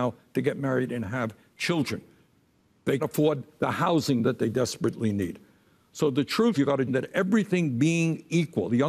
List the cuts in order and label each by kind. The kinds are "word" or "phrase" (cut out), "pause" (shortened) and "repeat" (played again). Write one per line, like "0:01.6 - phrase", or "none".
0:03.0 - word
0:06.5 - word
0:06.9 - word